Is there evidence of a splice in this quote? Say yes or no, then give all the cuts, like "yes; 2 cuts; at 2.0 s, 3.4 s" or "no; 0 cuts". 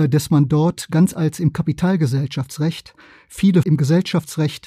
yes; 2 cuts; at 1.1 s, 3.6 s